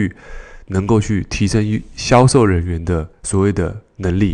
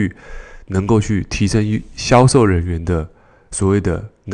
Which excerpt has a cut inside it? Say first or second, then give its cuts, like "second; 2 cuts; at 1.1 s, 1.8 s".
first; 1 cut; at 3.1 s